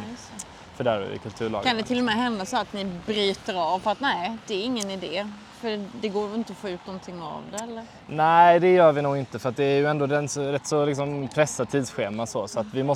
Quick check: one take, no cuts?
yes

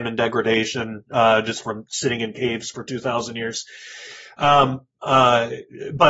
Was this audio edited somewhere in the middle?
no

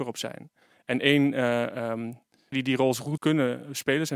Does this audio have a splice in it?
yes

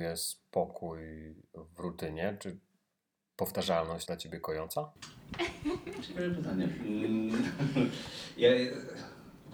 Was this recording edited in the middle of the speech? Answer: yes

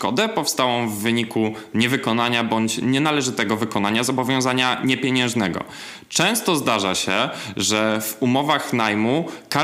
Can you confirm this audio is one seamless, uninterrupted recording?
yes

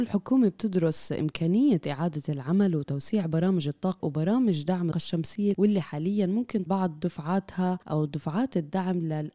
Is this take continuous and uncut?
no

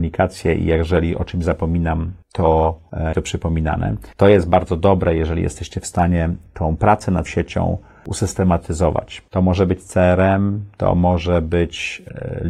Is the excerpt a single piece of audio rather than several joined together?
no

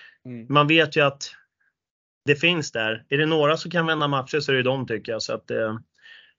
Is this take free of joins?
yes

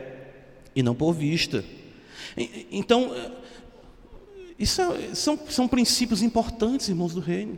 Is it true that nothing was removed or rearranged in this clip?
yes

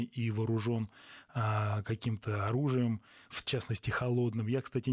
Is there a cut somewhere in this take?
no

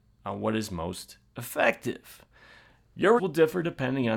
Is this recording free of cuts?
no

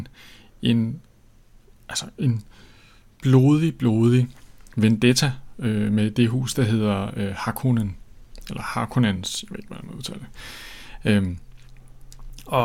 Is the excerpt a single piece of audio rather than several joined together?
yes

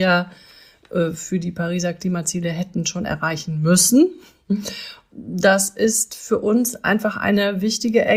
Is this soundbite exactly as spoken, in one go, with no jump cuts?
yes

